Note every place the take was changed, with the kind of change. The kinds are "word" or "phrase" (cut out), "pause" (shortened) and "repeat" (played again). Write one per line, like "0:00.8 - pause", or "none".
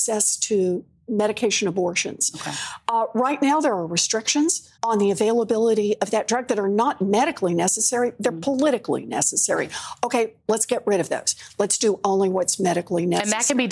0:04.7 - pause